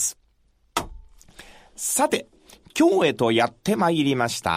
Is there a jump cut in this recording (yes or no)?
no